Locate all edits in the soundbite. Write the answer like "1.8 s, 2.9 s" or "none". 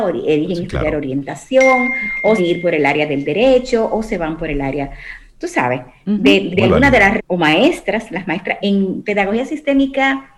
2.4 s, 6.5 s, 7.2 s, 8.6 s